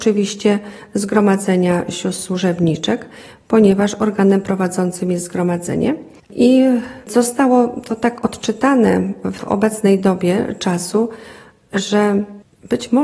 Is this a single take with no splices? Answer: yes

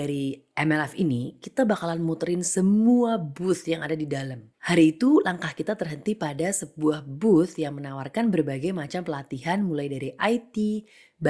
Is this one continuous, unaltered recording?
no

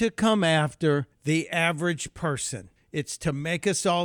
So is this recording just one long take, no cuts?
no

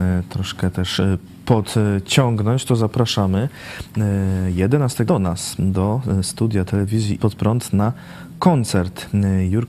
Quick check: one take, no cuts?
no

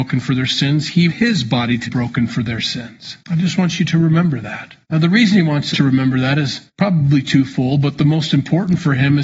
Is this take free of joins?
no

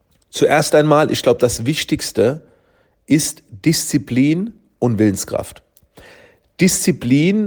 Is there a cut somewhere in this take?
no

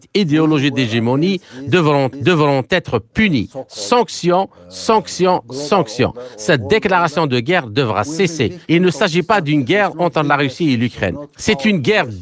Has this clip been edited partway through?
yes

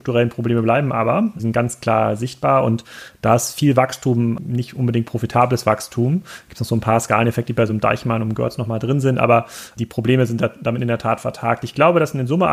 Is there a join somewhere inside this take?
no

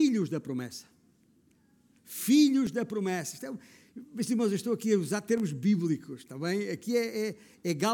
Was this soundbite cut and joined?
no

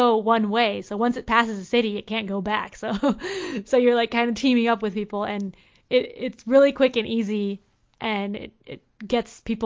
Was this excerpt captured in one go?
yes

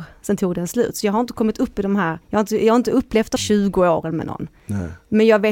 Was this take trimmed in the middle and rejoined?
yes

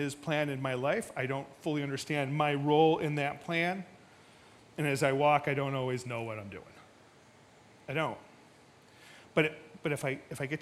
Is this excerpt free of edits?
yes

